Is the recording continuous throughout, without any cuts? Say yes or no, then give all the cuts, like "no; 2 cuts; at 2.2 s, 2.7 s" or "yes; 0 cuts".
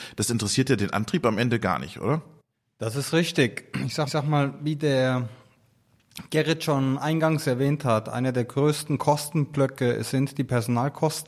no; 2 cuts; at 2.5 s, 4.1 s